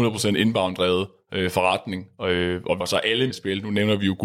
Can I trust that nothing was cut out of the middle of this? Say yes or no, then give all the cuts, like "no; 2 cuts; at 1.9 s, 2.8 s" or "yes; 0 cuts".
no; 2 cuts; at 2.8 s, 3.3 s